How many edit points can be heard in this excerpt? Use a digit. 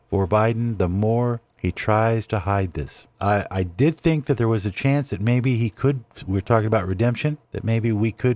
3